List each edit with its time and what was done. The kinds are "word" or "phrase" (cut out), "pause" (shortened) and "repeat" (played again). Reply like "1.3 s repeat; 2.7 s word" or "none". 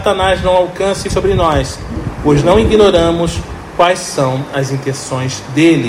1.1 s word